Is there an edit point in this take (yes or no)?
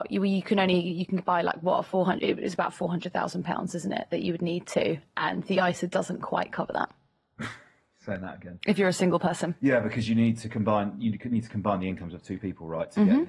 no